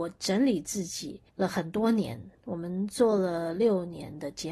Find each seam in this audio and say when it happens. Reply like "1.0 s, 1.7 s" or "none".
1.3 s